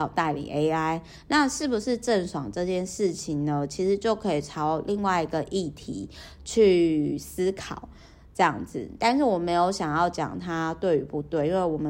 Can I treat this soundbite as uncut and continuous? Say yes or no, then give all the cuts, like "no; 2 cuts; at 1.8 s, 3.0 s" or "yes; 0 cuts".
yes; 0 cuts